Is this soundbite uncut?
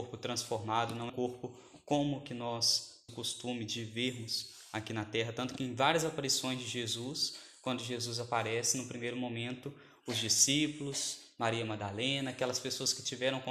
no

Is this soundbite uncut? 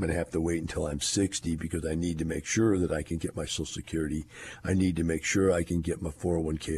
yes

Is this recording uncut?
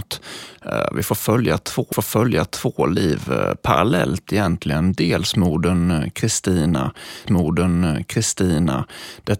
no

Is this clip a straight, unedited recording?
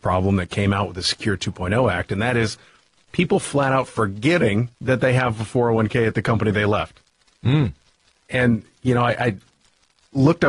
no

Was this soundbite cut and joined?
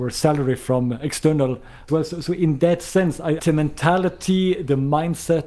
yes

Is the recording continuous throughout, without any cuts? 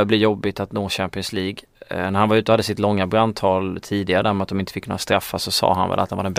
yes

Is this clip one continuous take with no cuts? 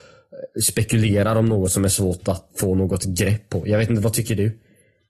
no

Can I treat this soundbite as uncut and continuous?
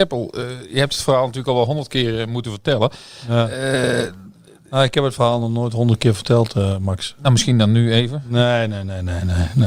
yes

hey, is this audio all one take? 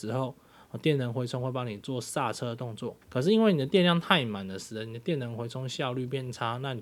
no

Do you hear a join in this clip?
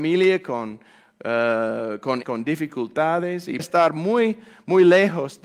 yes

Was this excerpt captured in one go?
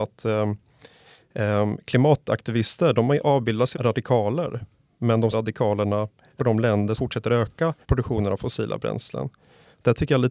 no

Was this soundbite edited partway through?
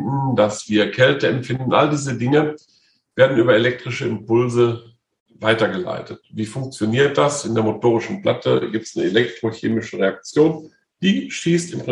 no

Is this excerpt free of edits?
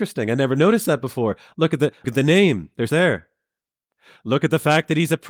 no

